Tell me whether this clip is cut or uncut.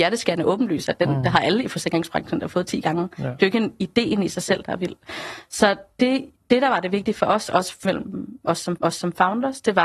cut